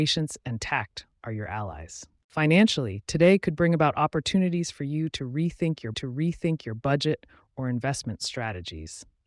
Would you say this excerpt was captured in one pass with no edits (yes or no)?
no